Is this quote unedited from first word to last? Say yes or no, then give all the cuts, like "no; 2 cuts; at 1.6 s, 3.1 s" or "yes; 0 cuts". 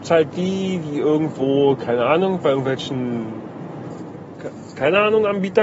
yes; 0 cuts